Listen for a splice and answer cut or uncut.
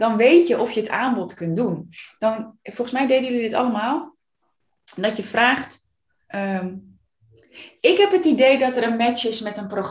uncut